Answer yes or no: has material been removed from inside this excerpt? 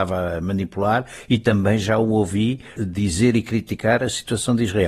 yes